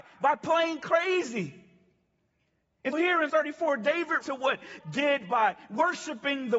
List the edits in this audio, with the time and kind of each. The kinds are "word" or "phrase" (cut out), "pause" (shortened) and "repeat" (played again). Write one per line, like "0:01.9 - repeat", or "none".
0:02.9 - word
0:03.3 - word
0:04.2 - word
0:04.8 - word